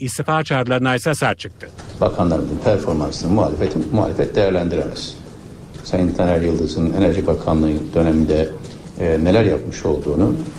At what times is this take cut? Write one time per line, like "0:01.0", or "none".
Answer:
none

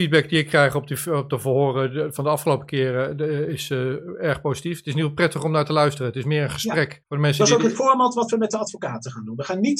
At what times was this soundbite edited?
0:07.0

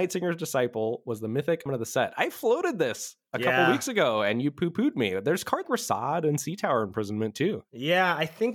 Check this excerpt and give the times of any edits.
0:01.7
0:05.6

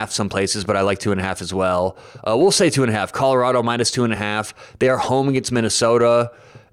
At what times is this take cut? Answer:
none

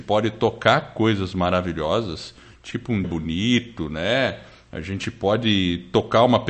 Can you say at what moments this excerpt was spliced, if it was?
0:03.0

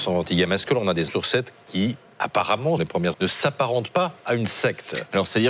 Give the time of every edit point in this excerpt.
0:01.1
0:01.7
0:02.8
0:03.1

